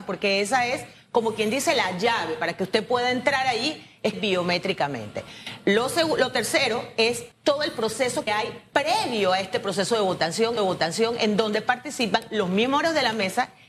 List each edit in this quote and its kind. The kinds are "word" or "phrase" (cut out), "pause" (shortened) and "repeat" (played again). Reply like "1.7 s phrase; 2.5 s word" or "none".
4.1 s phrase; 7.3 s pause; 8.3 s word; 10.6 s repeat